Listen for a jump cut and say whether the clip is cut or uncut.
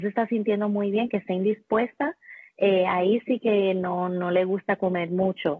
uncut